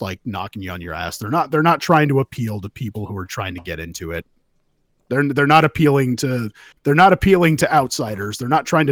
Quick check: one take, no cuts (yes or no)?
yes